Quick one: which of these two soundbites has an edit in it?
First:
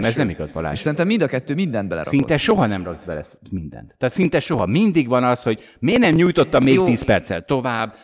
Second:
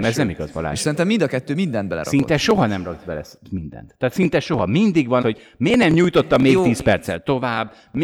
second; 1 cut; at 5.2 s

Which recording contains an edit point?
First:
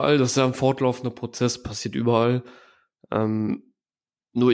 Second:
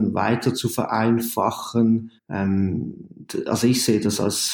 second; 1 cut; at 2.2 s

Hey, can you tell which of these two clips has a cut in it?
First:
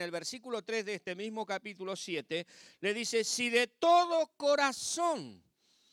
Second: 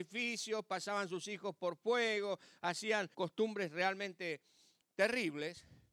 second; 1 cut; at 3.1 s

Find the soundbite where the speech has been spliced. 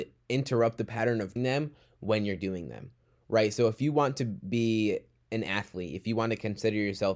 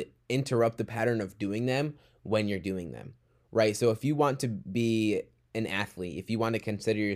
first; 1 cut; at 1.4 s

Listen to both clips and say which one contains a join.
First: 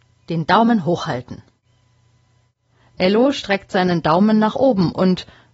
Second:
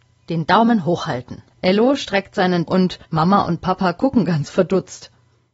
second; 3 cuts; at 1.5 s, 2.7 s, 3.0 s

